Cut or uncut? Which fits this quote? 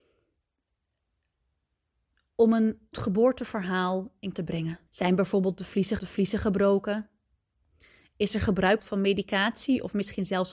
cut